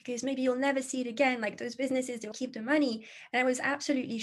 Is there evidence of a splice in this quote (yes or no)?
yes